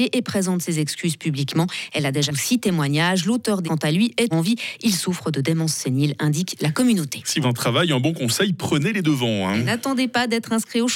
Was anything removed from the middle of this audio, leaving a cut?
yes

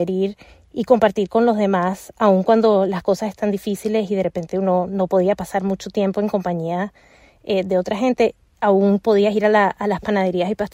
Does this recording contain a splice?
no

